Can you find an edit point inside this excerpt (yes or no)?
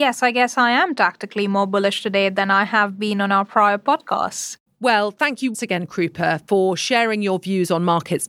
yes